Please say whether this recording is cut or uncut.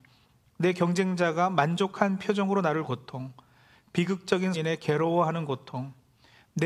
cut